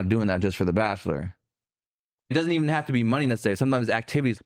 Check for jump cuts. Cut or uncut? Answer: uncut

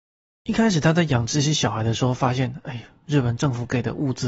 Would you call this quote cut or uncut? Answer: uncut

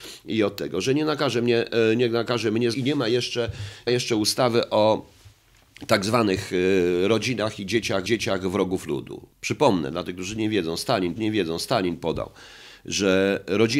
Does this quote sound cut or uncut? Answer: cut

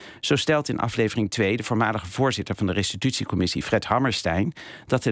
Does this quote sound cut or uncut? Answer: uncut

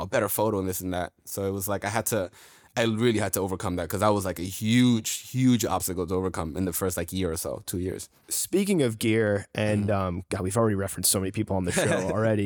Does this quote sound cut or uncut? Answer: uncut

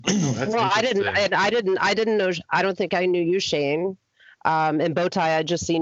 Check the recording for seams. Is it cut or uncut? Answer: uncut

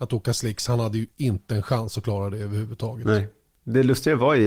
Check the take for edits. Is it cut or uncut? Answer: uncut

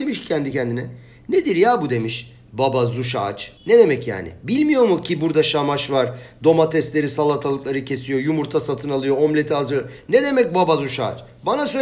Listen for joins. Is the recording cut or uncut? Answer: cut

